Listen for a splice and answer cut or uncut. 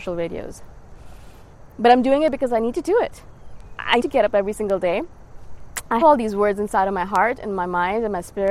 cut